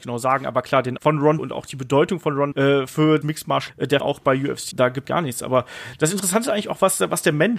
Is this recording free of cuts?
no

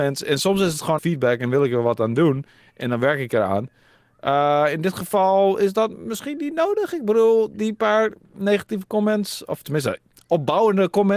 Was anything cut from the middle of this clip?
yes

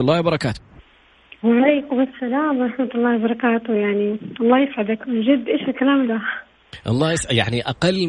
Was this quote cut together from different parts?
yes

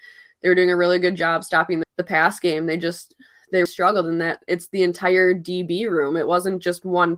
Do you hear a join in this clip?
yes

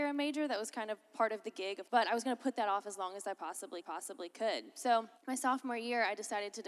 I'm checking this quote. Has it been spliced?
yes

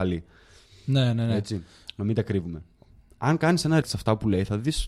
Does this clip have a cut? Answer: yes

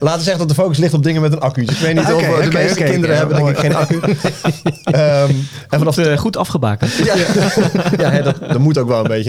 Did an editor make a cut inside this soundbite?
no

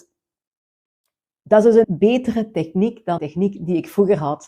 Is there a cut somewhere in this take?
yes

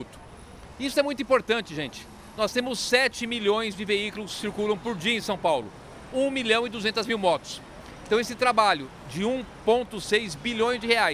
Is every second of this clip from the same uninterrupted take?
yes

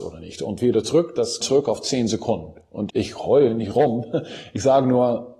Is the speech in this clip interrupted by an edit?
yes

